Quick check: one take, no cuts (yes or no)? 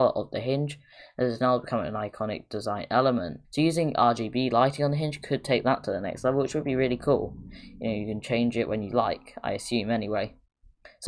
no